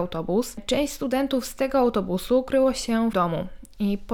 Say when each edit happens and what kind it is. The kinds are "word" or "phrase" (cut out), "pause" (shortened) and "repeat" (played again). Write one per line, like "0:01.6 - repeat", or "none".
0:03.1 - phrase